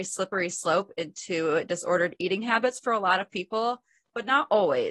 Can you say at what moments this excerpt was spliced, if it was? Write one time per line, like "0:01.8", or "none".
none